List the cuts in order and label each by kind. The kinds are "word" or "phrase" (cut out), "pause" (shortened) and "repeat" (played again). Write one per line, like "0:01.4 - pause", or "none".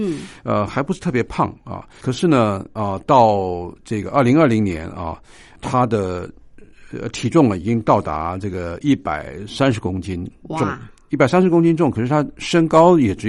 0:02.0 - word